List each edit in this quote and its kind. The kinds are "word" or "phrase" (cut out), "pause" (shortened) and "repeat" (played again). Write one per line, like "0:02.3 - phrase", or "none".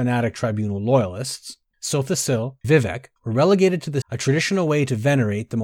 0:01.7 - word
0:02.6 - word
0:04.0 - phrase